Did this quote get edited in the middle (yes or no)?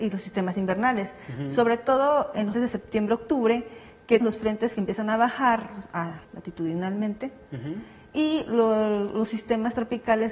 yes